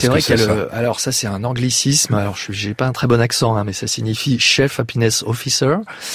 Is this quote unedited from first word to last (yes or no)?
yes